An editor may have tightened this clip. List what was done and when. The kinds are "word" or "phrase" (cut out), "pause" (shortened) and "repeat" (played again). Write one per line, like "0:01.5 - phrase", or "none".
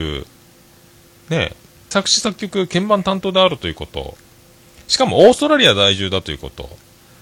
0:01.9 - word